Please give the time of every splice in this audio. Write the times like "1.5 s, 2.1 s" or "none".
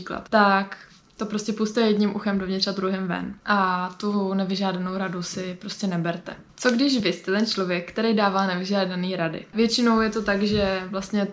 none

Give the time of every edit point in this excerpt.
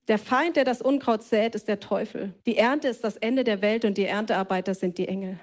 2.4 s

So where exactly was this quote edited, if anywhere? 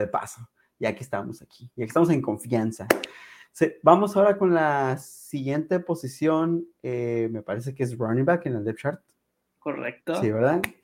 none

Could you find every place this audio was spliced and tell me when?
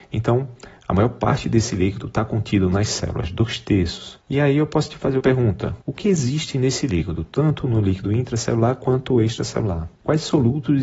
5.2 s, 5.8 s

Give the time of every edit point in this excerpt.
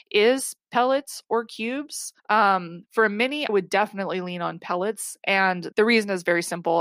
2.2 s, 3.5 s, 5.7 s

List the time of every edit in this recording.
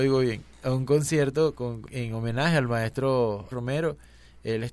1.9 s, 3.5 s

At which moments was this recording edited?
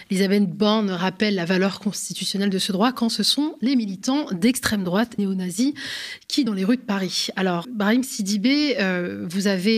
5.2 s, 6.5 s, 7.6 s

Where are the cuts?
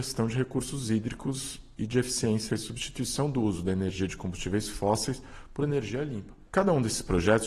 2.5 s

